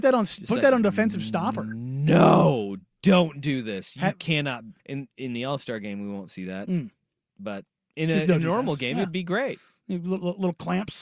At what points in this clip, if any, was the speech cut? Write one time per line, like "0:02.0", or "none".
0:04.8